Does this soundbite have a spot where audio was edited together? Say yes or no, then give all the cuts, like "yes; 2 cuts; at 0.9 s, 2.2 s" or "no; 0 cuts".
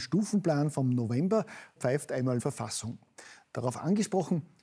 yes; 2 cuts; at 1.8 s, 2.4 s